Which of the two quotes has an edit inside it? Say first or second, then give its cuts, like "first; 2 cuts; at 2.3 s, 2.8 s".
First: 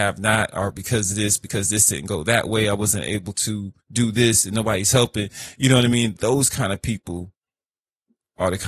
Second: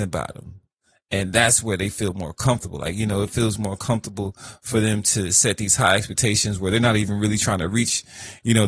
first; 1 cut; at 3.8 s